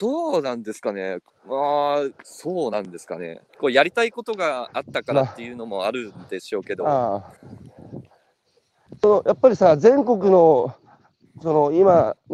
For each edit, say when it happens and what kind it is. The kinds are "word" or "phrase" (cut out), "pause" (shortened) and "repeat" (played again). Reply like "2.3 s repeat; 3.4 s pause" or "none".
1.3 s pause; 2.2 s pause; 3.5 s pause; 7.4 s pause